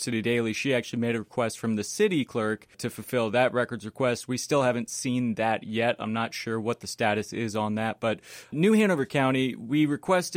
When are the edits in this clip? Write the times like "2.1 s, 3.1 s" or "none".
none